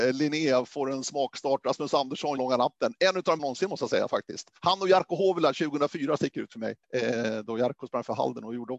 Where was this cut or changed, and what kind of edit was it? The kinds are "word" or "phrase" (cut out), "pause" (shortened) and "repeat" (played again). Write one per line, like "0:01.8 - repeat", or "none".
0:02.4 - phrase
0:03.4 - word
0:04.6 - pause
0:06.8 - pause